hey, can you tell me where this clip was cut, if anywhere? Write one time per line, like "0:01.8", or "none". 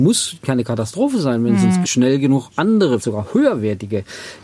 0:01.8
0:03.0

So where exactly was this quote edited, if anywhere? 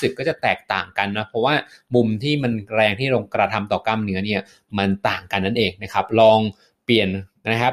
none

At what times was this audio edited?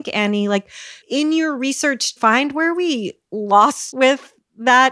0:01.0
0:02.2
0:03.9

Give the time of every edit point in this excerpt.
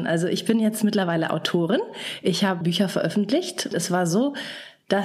0:02.6
0:03.7

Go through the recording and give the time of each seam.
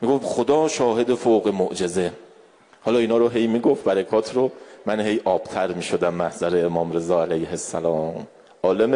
none

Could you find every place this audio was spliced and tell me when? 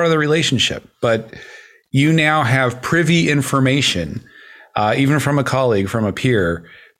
none

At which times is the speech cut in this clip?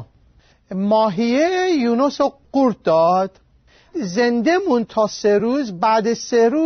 none

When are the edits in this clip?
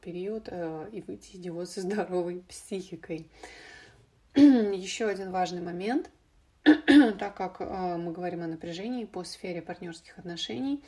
none

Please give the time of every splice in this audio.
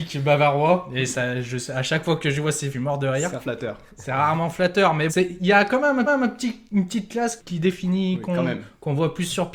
0:02.7
0:03.4
0:05.1
0:06.0
0:07.4

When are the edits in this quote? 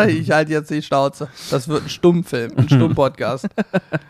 none

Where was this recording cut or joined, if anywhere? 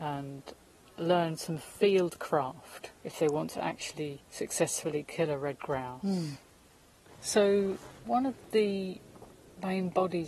0:03.0
0:04.2

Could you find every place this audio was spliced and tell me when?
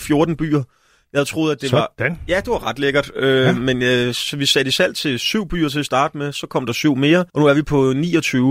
0:07.3

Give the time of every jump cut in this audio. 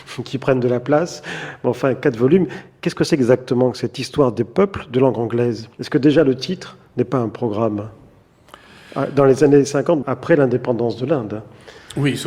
0:05.7
0:10.0

